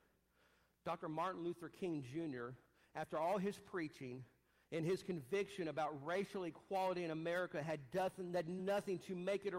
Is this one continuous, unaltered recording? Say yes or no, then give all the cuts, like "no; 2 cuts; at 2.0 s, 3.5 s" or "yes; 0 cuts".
no; 1 cut; at 8.6 s